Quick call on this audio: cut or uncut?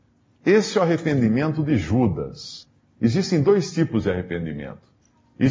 uncut